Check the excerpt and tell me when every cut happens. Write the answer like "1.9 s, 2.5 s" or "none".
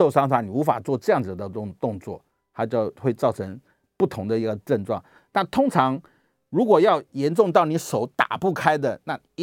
none